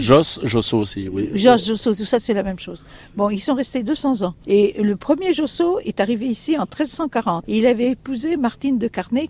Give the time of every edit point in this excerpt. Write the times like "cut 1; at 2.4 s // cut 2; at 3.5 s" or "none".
cut 1; at 4.4 s